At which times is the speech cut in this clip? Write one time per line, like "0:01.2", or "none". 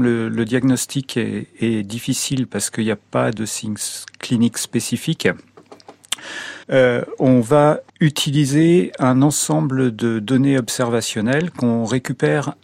0:06.6
0:07.9